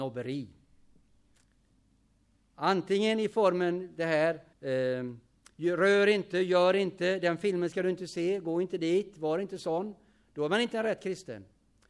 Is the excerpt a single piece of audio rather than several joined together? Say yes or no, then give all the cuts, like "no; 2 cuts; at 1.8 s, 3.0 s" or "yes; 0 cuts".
no; 1 cut; at 4.5 s